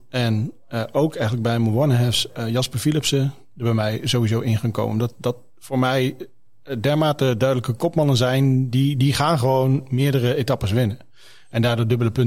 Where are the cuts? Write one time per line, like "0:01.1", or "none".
none

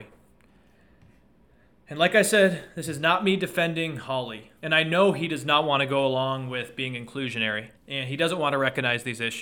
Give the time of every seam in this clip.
0:04.6
0:07.8

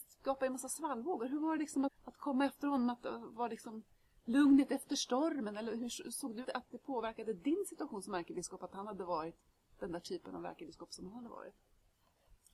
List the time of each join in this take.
0:01.9
0:06.4

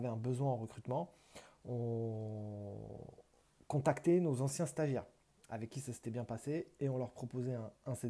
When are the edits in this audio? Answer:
none

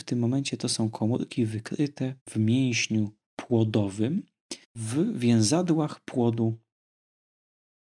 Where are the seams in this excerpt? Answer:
0:02.2
0:04.6

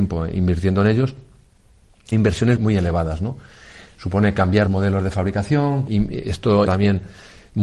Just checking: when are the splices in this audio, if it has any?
0:02.1
0:02.6
0:04.7
0:05.9
0:06.7

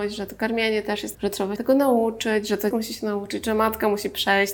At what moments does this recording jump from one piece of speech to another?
0:01.1
0:01.6
0:02.7

